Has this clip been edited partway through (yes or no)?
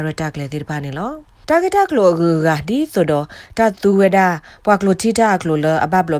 no